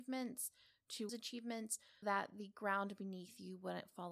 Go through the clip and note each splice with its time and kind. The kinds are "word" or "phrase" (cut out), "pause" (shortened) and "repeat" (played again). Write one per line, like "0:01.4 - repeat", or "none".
0:01.1 - phrase
0:02.0 - word

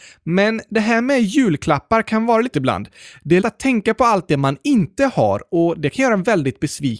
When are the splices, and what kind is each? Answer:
0:02.5 - word
0:03.4 - word

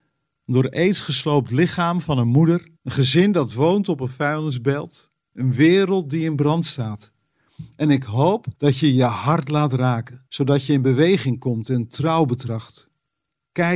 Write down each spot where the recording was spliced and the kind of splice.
0:02.8 - pause
0:08.6 - pause
0:10.3 - pause

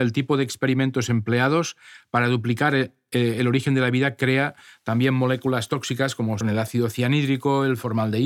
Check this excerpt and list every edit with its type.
0:06.4 - word

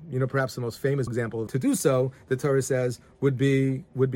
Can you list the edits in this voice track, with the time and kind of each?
0:01.1 - word
0:01.5 - phrase

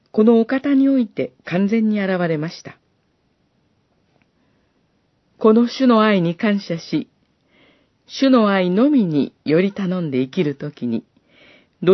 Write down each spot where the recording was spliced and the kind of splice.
0:01.4 - pause

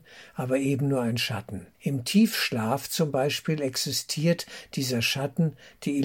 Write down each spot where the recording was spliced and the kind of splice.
0:01.7 - pause

